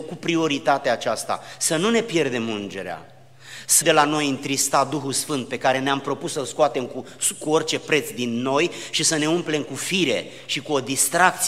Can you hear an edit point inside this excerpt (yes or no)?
yes